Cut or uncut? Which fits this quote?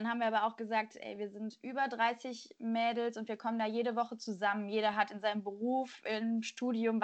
uncut